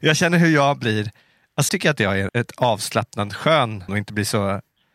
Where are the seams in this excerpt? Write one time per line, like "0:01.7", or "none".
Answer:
0:01.7
0:02.3
0:03.9